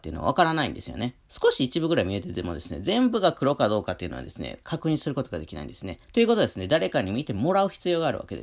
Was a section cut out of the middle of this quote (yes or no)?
yes